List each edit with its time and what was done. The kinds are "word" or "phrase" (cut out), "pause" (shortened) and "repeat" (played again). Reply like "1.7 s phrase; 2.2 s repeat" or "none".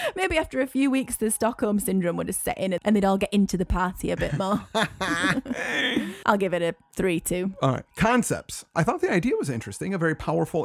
7.9 s pause